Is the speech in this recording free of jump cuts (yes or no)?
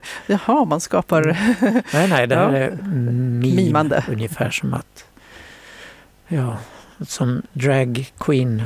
yes